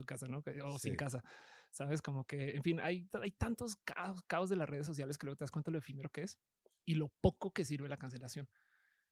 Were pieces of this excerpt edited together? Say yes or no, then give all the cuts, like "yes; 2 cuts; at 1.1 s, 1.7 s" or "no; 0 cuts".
no; 0 cuts